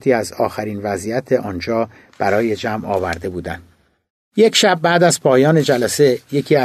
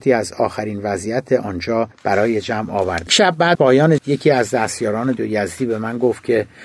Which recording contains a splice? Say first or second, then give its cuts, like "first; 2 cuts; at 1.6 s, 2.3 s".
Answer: second; 5 cuts; at 1.9 s, 3.1 s, 3.5 s, 4.0 s, 5.2 s